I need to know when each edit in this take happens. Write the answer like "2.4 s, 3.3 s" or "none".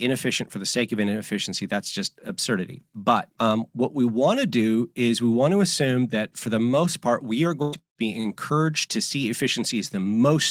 none